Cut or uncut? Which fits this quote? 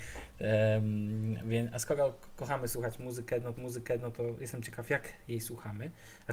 cut